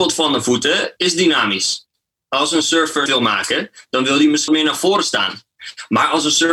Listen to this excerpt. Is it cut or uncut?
cut